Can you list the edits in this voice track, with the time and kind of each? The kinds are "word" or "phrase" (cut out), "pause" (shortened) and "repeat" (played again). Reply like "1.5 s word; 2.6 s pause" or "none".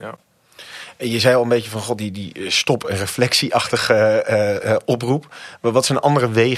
none